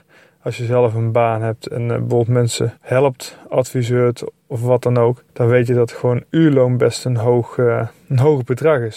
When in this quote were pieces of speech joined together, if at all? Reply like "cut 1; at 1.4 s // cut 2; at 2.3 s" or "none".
cut 1; at 2.8 s // cut 2; at 5.3 s